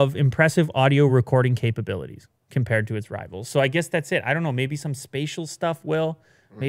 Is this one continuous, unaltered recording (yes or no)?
yes